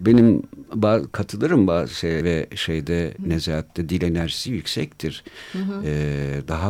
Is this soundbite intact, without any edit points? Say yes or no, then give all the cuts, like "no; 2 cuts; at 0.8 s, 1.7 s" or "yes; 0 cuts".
no; 2 cuts; at 2.2 s, 3.2 s